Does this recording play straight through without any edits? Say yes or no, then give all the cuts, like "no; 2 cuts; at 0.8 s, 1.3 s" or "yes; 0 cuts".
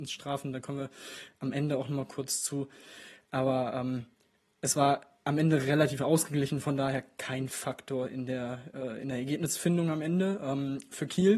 yes; 0 cuts